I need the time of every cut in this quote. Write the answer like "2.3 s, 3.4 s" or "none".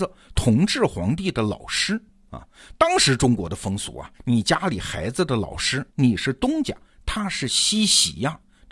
4.1 s, 5.9 s